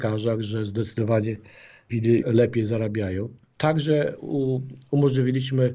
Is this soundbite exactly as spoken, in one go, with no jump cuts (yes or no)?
no